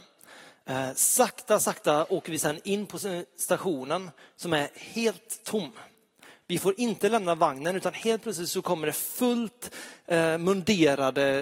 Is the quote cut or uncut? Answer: uncut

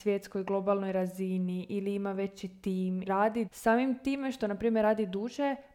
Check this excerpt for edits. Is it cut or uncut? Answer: cut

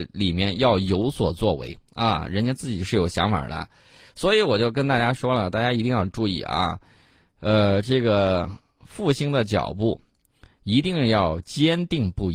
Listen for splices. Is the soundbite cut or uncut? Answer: uncut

